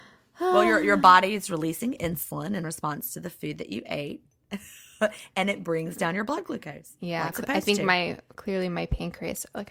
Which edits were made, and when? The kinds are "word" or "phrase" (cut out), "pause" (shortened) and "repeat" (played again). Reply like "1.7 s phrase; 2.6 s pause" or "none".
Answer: 7.3 s word